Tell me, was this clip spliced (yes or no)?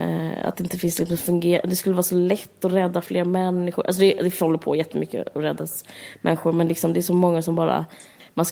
no